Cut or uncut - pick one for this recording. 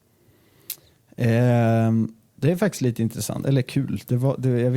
uncut